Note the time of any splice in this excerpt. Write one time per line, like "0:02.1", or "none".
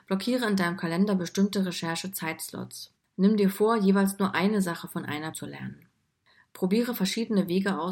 0:03.0
0:05.3